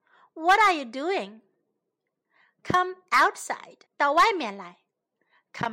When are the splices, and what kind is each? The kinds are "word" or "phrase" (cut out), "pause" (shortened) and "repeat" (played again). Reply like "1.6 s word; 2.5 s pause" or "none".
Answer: 3.9 s pause